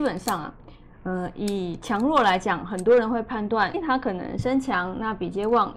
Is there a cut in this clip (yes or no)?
yes